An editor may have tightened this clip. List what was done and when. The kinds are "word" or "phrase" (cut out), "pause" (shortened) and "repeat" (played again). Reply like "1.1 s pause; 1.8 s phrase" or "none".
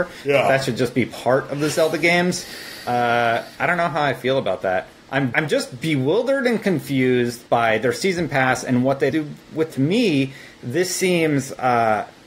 3.5 s pause; 5.3 s word; 7.5 s pause; 9.1 s word; 9.7 s phrase

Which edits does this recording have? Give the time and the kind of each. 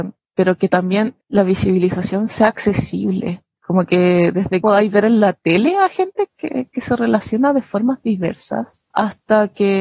4.6 s phrase; 6.3 s word; 8.9 s pause

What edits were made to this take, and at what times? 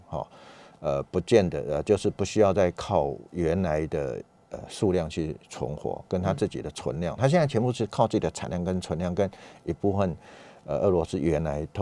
none

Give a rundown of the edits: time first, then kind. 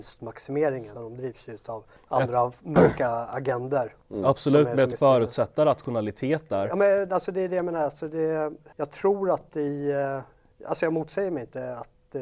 0.9 s word; 2.0 s pause; 4.9 s phrase; 8.7 s pause

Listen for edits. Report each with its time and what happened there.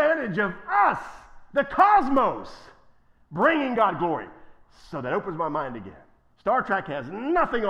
none

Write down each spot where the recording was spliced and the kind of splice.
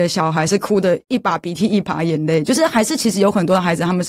1.0 s pause

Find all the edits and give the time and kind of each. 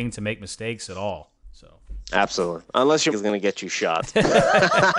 3.1 s word

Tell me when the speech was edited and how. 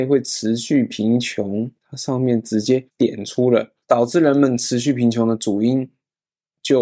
1.8 s pause; 2.9 s pause; 3.8 s pause

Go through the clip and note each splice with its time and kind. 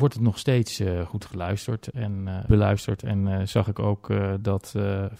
2.5 s word

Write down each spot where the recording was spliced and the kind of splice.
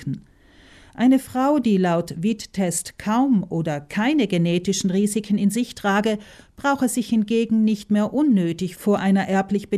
none

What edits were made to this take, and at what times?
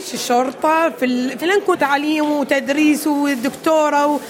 1.4 s phrase; 1.7 s phrase

